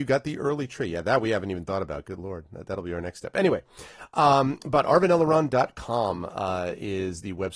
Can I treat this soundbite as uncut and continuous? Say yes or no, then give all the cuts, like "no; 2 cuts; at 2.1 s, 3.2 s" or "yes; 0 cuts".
yes; 0 cuts